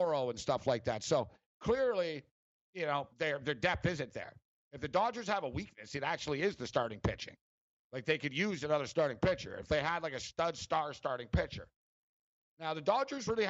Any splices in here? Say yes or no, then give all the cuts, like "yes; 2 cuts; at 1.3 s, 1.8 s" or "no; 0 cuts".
no; 0 cuts